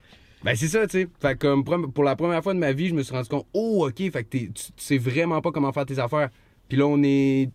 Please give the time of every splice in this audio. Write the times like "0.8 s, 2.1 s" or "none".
none